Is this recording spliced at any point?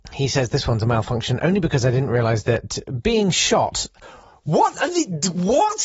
no; 0 cuts

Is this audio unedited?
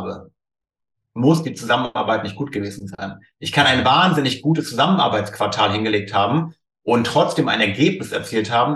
yes; 0 cuts

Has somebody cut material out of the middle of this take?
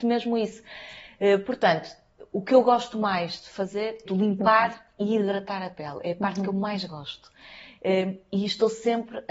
yes; 1 cut; at 4.0 s

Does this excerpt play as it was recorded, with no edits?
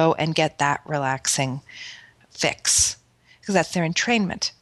yes; 0 cuts

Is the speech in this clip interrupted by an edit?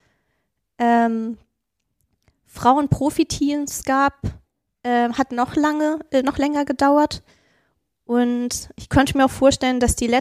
no; 0 cuts

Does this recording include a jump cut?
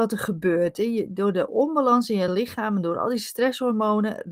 no; 0 cuts

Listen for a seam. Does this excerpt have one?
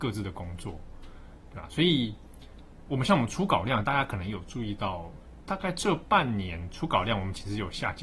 yes; 1 cut; at 2.9 s

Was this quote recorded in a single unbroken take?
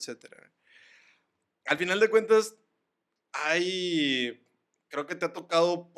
yes; 0 cuts

